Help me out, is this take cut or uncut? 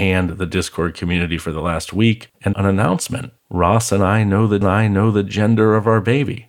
cut